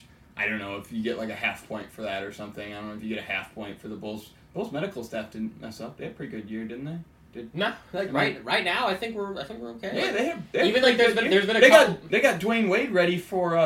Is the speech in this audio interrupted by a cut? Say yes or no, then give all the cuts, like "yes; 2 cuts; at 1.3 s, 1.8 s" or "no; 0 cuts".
no; 0 cuts